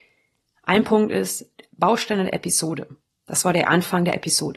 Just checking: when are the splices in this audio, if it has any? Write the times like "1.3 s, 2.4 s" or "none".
none